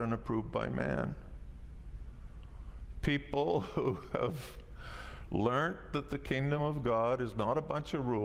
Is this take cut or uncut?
uncut